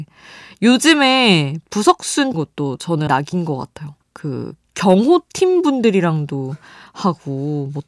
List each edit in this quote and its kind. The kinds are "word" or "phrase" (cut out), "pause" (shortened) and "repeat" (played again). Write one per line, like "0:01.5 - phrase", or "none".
0:02.3 - phrase
0:03.1 - word
0:04.0 - pause